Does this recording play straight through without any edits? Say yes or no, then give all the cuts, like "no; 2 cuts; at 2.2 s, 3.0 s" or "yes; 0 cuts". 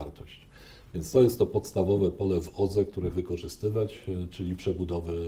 no; 1 cut; at 3.1 s